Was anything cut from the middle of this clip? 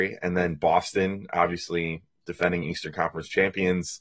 no; 0 cuts

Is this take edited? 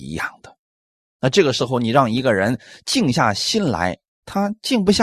no; 0 cuts

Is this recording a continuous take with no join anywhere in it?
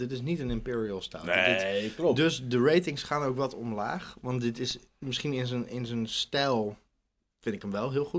yes; 0 cuts

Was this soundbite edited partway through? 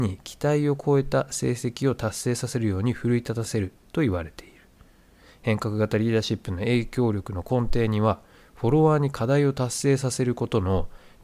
no; 0 cuts

